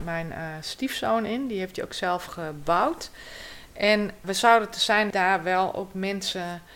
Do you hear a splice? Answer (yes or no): yes